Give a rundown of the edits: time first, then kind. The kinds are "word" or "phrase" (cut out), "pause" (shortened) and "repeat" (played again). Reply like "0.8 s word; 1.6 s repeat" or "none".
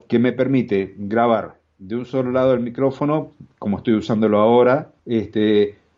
5.0 s pause